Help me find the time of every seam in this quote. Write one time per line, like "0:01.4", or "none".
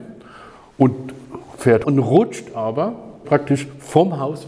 0:01.8
0:03.2